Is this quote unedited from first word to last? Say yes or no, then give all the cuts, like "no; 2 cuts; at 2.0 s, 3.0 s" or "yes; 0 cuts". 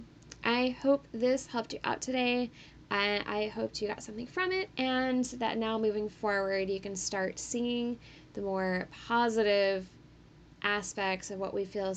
no; 1 cut; at 4.7 s